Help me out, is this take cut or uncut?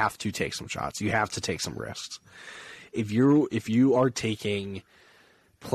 uncut